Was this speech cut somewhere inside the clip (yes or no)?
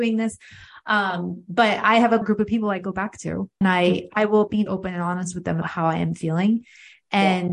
yes